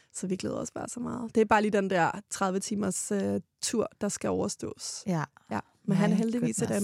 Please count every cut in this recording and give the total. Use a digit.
0